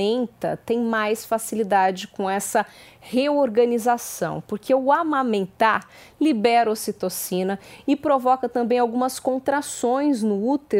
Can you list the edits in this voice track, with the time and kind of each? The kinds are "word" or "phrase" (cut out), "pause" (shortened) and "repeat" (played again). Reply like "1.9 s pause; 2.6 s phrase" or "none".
none